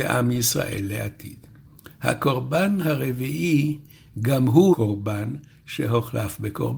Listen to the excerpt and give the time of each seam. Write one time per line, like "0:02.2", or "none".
0:04.7